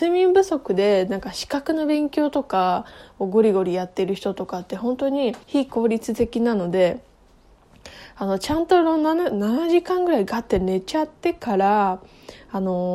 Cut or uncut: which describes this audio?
cut